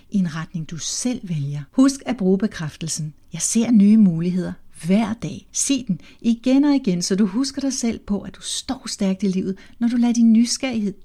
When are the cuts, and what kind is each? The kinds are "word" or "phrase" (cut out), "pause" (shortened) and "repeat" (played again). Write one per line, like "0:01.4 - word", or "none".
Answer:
0:01.7 - pause
0:03.2 - pause
0:05.5 - pause